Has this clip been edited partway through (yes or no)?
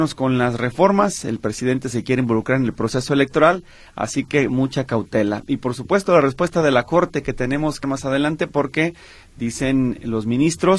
yes